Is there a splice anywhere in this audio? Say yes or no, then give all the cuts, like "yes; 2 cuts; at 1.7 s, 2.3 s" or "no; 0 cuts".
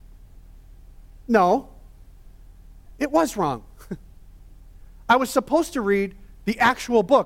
no; 0 cuts